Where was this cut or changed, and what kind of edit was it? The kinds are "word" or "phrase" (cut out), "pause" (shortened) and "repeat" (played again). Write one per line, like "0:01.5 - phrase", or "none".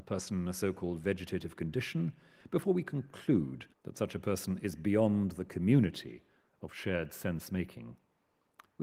0:03.7 - pause